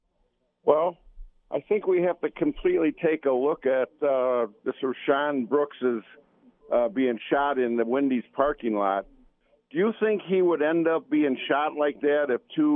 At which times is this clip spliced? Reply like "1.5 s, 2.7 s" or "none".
none